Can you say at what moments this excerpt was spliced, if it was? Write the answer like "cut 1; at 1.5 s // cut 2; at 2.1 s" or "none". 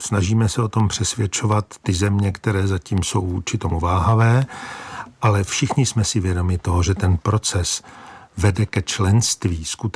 none